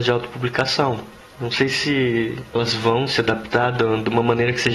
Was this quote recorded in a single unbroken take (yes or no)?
yes